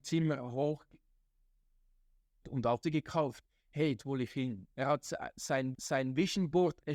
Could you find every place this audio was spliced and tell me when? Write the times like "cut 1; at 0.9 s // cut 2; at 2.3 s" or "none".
cut 1; at 2.4 s // cut 2; at 2.8 s // cut 3; at 4.0 s // cut 4; at 4.7 s // cut 5; at 5.7 s